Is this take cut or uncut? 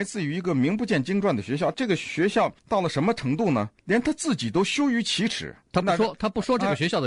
cut